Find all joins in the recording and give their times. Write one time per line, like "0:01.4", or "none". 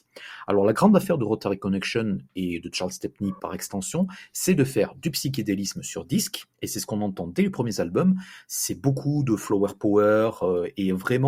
0:03.4
0:06.5